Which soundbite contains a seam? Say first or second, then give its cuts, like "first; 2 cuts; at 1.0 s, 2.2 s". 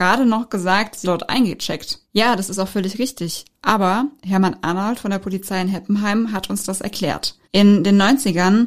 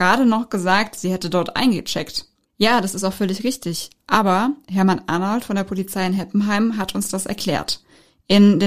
first; 3 cuts; at 1.0 s, 2.0 s, 7.4 s